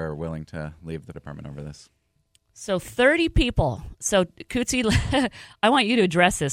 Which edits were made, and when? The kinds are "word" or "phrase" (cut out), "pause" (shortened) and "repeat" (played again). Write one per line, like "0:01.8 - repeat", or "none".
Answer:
0:01.1 - word